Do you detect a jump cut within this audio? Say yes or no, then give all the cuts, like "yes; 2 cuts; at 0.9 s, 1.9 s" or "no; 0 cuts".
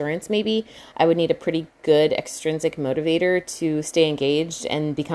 no; 0 cuts